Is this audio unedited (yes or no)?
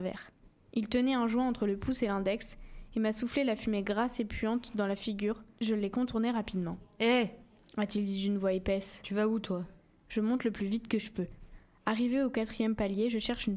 yes